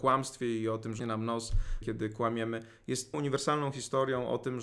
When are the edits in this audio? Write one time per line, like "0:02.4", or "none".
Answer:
0:01.0
0:01.8
0:03.1